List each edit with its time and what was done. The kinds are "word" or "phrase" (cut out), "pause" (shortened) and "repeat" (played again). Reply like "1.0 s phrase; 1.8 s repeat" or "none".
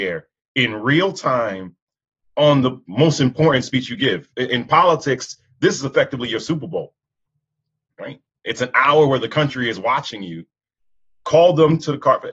none